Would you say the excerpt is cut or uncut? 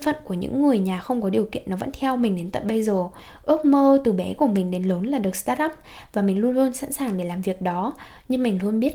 uncut